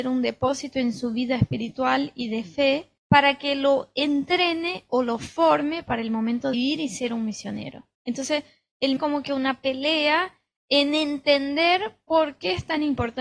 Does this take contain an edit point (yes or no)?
yes